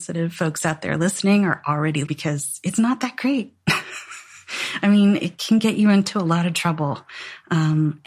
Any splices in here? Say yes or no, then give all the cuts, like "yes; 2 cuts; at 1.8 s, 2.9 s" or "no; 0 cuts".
yes; 1 cut; at 2.1 s